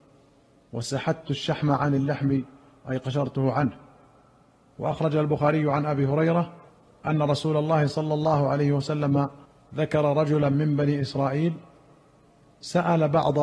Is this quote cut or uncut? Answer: cut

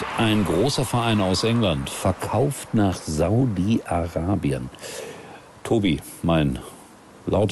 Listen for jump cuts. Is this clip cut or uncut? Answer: uncut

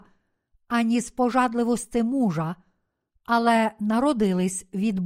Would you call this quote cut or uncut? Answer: uncut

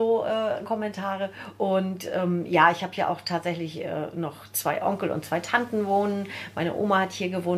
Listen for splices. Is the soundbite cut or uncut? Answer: uncut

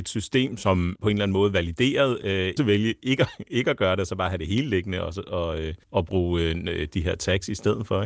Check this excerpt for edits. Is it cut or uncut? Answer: cut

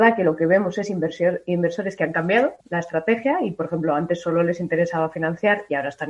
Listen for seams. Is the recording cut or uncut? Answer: cut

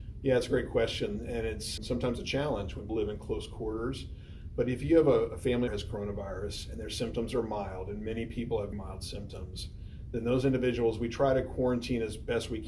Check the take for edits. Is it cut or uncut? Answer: cut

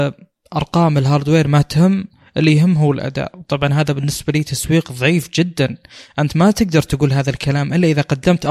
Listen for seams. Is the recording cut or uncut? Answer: uncut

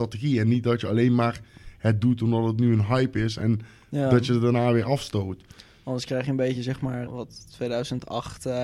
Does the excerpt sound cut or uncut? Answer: cut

